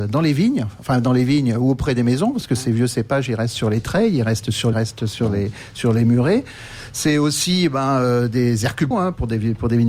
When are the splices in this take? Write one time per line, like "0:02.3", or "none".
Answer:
0:04.7
0:08.9